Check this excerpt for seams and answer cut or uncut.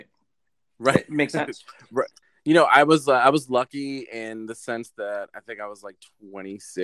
cut